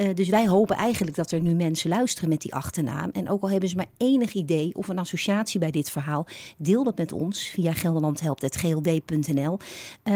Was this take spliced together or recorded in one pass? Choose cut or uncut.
uncut